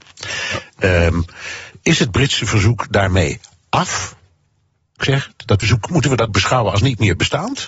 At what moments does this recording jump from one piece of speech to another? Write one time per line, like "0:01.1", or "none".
0:05.0
0:05.6
0:06.3